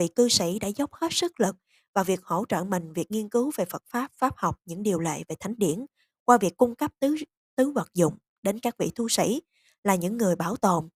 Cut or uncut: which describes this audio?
uncut